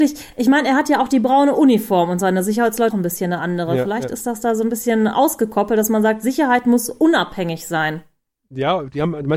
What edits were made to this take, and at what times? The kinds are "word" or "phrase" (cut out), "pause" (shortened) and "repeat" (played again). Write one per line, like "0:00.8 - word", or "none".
0:02.9 - word